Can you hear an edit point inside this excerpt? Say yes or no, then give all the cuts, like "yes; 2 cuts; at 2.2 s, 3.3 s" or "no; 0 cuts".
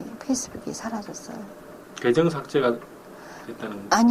yes; 1 cut; at 1.8 s